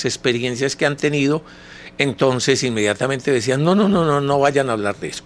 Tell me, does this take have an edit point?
no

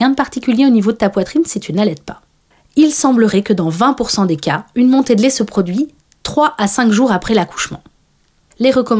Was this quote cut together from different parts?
no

